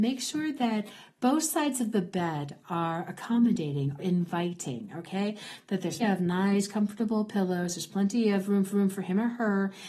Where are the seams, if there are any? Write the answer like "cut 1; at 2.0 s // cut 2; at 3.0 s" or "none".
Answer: cut 1; at 4.0 s // cut 2; at 6.0 s // cut 3; at 8.7 s